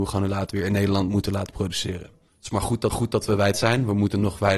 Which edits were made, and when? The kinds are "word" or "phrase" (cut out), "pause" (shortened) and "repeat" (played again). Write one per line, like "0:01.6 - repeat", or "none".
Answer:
0:02.9 - repeat
0:03.5 - word